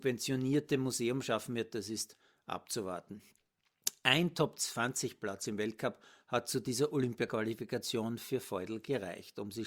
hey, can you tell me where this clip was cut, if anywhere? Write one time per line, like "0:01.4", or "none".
none